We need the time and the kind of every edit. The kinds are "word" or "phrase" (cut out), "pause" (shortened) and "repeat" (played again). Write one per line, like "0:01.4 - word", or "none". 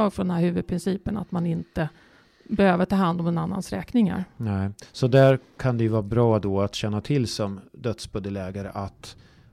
none

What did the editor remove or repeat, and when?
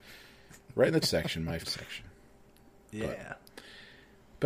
0:01.0 - word
0:01.6 - word

